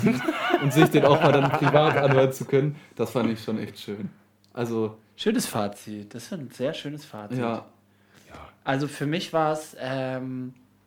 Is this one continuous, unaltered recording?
yes; 0 cuts

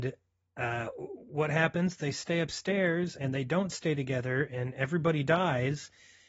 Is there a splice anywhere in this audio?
no; 0 cuts

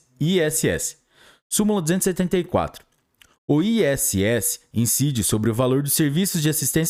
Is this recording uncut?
yes; 0 cuts

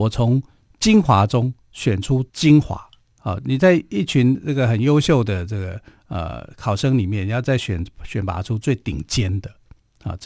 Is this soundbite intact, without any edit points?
no; 2 cuts; at 2.3 s, 3.1 s

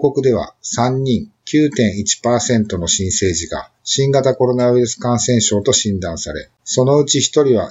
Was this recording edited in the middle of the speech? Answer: yes; 2 cuts; at 3.8 s, 6.6 s

